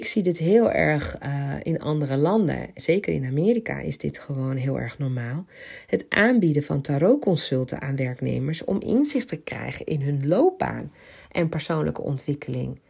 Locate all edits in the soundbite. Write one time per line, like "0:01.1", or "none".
0:02.8